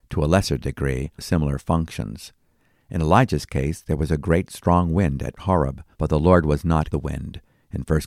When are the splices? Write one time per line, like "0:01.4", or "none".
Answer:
0:01.2
0:05.4
0:05.9
0:06.9

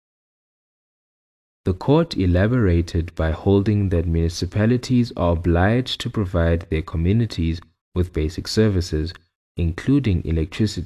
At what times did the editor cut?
none

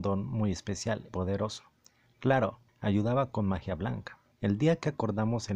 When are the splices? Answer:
0:01.1
0:02.7
0:04.3

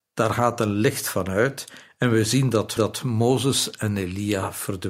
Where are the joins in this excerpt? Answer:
0:02.8

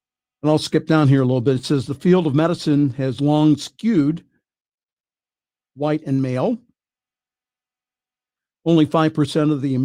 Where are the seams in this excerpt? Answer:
none

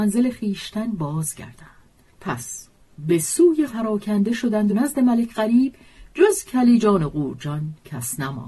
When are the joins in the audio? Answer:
0:03.7
0:04.7

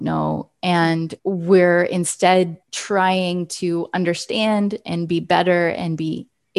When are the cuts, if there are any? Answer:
0:01.2
0:02.6

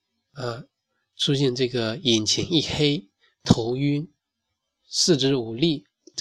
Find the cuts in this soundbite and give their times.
none

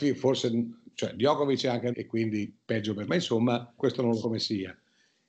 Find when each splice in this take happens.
0:01.9
0:03.1
0:03.8
0:04.2

